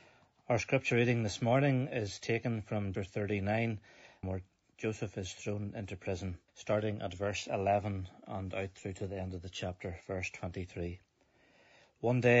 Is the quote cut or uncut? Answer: cut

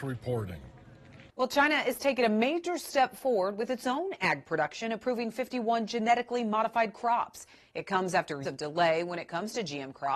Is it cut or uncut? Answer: cut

